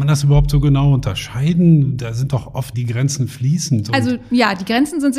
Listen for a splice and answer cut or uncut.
cut